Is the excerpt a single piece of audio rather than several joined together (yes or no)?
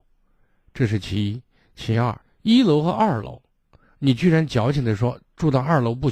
no